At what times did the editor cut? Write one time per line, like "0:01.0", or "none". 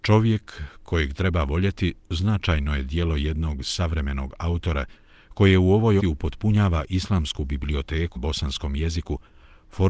0:06.0
0:08.2